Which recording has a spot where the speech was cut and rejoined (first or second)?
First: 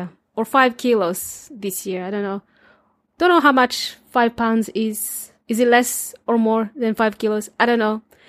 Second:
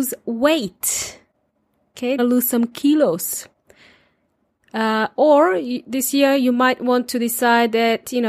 second